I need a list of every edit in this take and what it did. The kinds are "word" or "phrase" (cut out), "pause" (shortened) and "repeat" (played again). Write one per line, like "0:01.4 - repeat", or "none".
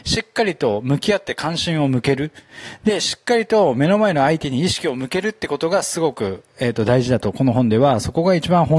none

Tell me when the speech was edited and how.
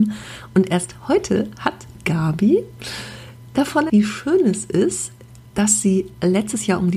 0:02.0 - word
0:03.9 - word

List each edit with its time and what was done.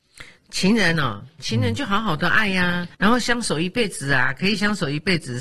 0:02.9 - pause

